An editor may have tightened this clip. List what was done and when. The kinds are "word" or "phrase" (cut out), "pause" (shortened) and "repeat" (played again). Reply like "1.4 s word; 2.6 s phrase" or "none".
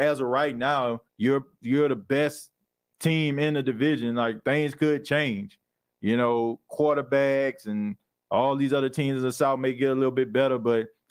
1.1 s pause